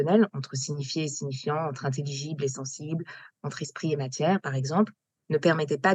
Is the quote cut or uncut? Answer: uncut